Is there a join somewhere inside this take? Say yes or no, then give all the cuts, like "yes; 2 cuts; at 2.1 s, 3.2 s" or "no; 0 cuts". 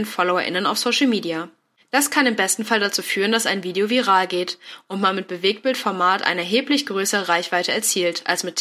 no; 0 cuts